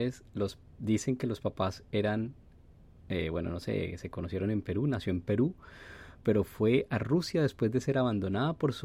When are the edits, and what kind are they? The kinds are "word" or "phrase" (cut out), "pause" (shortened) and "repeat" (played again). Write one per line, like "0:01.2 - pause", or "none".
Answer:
none